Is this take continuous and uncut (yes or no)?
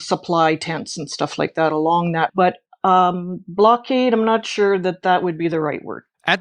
no